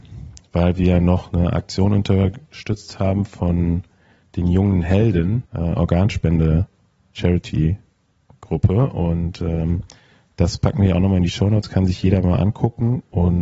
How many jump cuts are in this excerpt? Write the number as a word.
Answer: one